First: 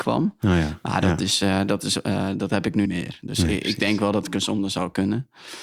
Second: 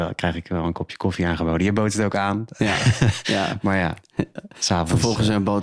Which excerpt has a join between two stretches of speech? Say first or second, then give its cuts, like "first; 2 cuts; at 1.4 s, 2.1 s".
first; 1 cut; at 2.9 s